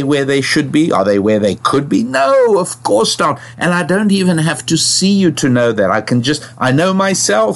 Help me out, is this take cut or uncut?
uncut